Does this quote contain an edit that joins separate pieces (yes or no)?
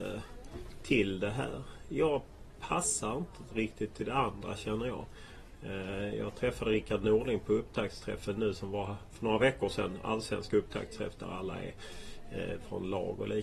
no